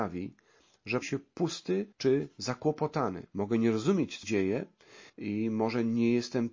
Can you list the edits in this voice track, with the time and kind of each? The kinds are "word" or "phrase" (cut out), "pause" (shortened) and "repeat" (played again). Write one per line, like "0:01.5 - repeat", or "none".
0:01.0 - word
0:01.9 - pause
0:03.3 - pause
0:04.2 - word
0:05.1 - pause